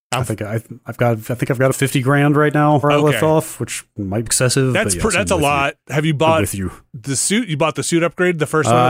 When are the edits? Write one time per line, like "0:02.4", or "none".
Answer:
0:01.7
0:02.8
0:04.3